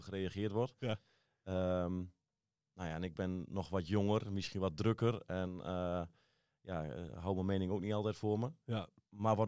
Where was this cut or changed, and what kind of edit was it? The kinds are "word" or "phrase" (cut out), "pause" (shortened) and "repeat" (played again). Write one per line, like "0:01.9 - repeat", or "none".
none